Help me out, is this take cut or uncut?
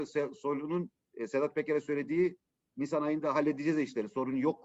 uncut